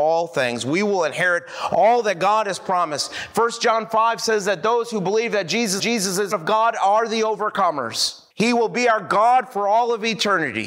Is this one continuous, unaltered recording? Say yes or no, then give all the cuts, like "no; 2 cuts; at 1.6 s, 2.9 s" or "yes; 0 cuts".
no; 3 cuts; at 5.8 s, 6.3 s, 8.3 s